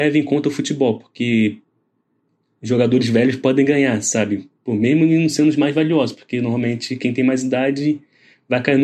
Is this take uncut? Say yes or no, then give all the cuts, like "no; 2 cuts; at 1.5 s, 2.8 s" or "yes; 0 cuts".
yes; 0 cuts